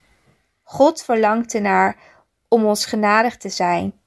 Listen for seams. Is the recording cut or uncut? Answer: uncut